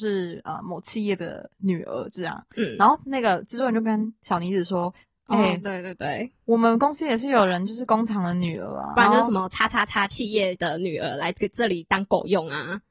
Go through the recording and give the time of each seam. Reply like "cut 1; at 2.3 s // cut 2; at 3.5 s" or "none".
cut 1; at 5.0 s // cut 2; at 8.9 s